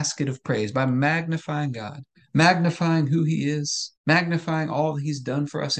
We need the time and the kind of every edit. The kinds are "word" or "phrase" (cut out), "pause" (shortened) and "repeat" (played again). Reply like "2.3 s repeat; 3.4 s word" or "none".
2.1 s pause; 4.0 s pause